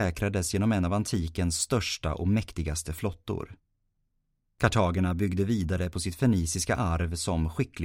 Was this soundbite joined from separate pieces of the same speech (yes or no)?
no